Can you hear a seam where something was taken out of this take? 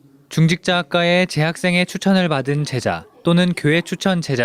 no; 0 cuts

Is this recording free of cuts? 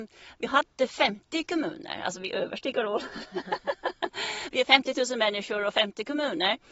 yes; 0 cuts

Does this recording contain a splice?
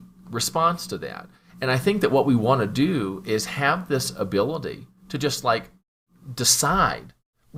no; 0 cuts

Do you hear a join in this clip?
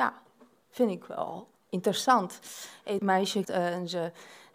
yes; 2 cuts; at 3.0 s, 3.4 s

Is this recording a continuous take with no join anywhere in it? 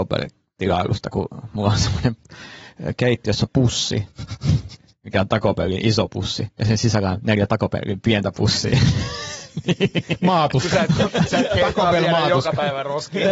yes; 0 cuts

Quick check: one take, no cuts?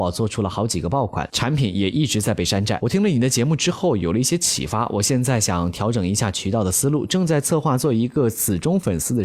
yes; 0 cuts

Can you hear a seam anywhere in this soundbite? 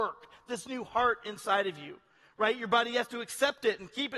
no; 0 cuts

